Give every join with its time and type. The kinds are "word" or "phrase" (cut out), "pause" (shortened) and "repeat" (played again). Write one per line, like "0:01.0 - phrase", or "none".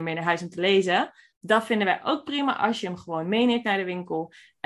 0:01.3 - pause